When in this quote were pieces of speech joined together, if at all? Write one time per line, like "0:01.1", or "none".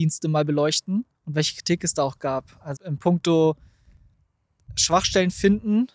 0:01.1
0:02.8